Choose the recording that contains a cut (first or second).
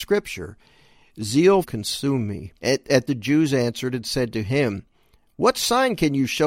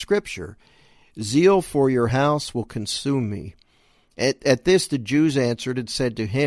first